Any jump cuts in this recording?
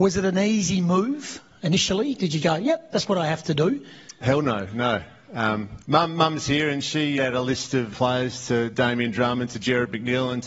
yes; 5 cuts; at 2.4 s, 5.8 s, 7.2 s, 7.9 s, 8.7 s

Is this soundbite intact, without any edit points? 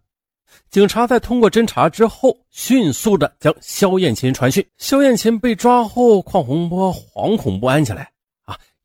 no; 1 cut; at 4.7 s

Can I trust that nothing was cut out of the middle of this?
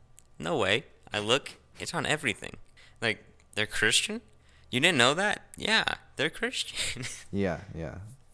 no; 1 cut; at 2.8 s

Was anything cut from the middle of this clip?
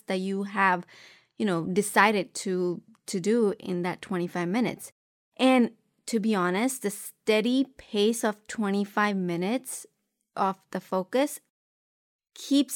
no; 0 cuts

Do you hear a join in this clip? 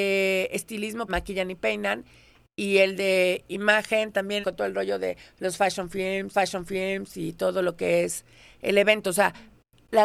yes; 3 cuts; at 1.1 s, 4.4 s, 6.3 s

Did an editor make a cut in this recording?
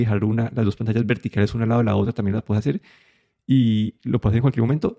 no; 0 cuts

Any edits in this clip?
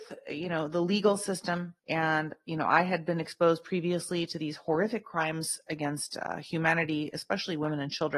yes; 1 cut; at 1.8 s

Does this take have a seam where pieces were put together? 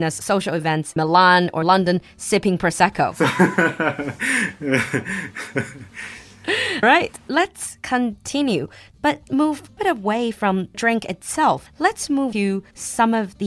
yes; 7 cuts; at 1.0 s, 1.6 s, 6.8 s, 9.3 s, 9.8 s, 10.7 s, 12.3 s

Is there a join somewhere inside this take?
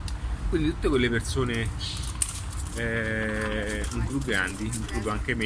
yes; 1 cut; at 4.1 s

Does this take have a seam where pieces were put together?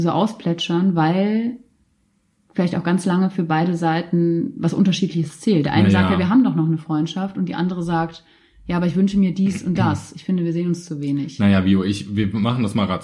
no; 0 cuts

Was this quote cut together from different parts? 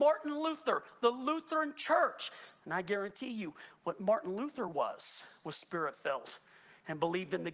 no; 0 cuts

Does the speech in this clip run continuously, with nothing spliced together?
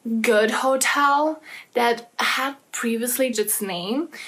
no; 1 cut; at 3.3 s

